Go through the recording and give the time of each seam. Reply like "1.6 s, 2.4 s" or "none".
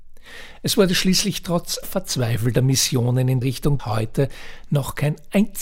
1.8 s, 3.4 s, 3.8 s